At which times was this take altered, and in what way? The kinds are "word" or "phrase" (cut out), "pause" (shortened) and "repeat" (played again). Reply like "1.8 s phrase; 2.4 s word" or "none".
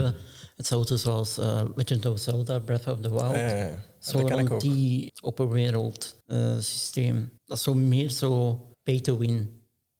5.1 s word; 6.2 s pause; 7.4 s pause; 8.7 s pause

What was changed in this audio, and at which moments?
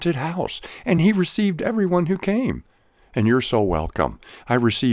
none

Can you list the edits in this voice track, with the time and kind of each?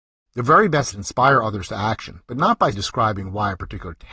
0.9 s word; 2.7 s word

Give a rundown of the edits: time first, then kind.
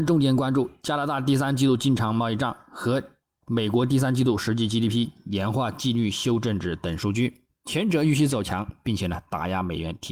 7.5 s pause

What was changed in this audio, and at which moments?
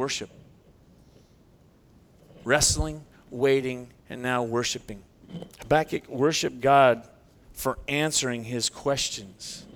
4.0 s pause; 5.5 s pause

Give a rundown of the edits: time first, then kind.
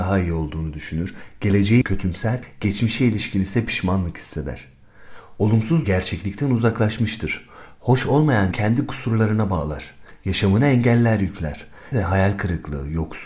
1.8 s word; 5.8 s word; 8.5 s word; 11.9 s word

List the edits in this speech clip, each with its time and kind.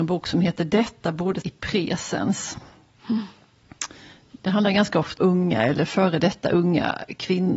1.4 s word; 5.2 s word

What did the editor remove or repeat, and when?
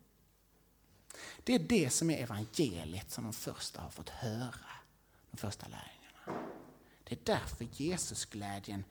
none

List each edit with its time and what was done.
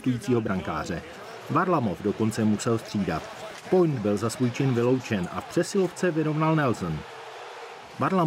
none

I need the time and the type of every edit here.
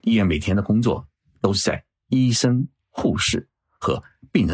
none

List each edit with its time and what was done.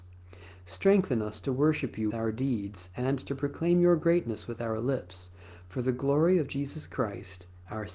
2.1 s word

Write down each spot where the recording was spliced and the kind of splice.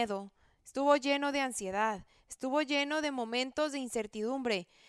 none

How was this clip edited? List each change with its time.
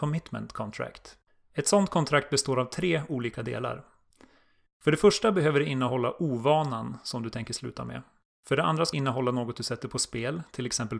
1.3 s pause; 8.3 s pause; 8.9 s word

